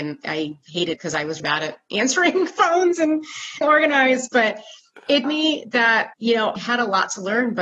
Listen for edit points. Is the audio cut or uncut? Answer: cut